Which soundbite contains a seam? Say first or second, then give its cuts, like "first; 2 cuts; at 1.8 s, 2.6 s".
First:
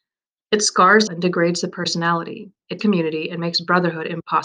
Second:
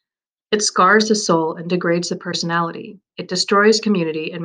first; 2 cuts; at 1.1 s, 2.8 s